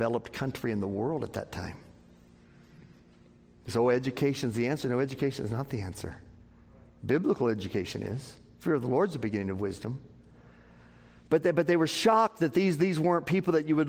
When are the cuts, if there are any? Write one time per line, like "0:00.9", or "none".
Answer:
none